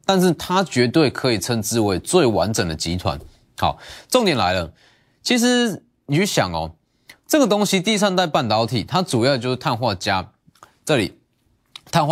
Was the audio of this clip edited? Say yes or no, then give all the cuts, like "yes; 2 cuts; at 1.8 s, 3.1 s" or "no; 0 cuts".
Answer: no; 0 cuts